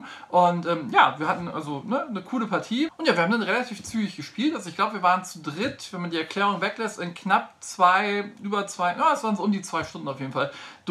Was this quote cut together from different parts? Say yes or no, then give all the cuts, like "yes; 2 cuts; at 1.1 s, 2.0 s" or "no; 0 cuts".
no; 0 cuts